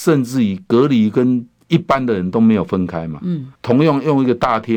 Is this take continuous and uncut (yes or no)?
no